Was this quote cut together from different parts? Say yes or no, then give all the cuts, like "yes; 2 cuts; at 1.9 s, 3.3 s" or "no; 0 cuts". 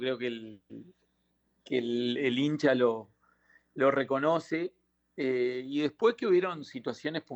no; 0 cuts